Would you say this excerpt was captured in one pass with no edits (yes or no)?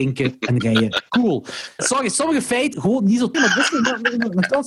no